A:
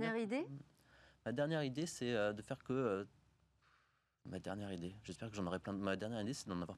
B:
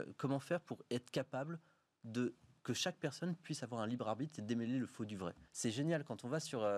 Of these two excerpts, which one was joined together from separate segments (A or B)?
B